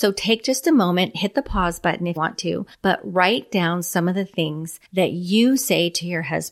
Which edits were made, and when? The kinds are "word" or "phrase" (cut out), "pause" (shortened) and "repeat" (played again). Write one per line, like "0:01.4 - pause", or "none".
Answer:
0:02.2 - word
0:02.7 - pause
0:04.8 - pause